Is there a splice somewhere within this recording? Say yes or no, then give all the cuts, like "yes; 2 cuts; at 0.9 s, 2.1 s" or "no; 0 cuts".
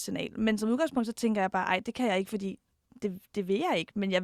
no; 0 cuts